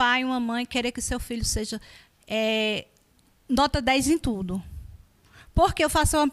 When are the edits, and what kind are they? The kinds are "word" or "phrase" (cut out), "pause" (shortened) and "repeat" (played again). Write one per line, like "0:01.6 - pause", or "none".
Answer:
none